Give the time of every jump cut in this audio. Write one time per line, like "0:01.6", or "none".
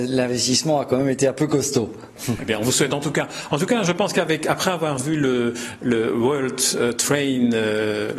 none